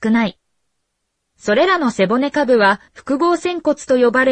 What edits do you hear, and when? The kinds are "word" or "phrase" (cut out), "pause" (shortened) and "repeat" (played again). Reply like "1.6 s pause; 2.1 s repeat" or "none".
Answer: 2.9 s pause